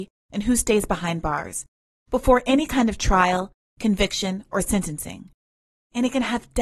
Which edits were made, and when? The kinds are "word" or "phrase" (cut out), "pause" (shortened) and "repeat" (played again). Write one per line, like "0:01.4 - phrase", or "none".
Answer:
none